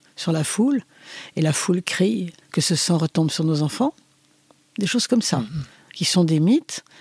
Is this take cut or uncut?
uncut